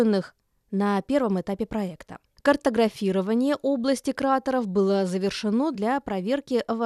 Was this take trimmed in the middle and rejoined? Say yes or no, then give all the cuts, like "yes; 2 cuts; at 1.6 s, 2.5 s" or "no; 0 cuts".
no; 0 cuts